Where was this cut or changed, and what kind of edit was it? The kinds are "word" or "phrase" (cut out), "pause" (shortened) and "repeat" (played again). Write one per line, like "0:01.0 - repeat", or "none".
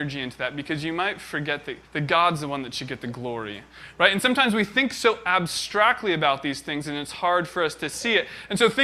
0:01.8 - pause